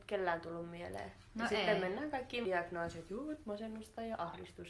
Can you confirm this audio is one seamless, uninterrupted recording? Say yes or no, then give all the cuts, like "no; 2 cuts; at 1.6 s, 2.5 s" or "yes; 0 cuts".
no; 1 cut; at 2.4 s